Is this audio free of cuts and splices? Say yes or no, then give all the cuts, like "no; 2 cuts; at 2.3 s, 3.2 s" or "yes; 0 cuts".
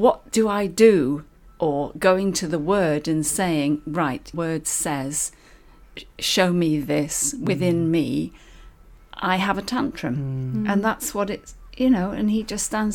no; 1 cut; at 4.3 s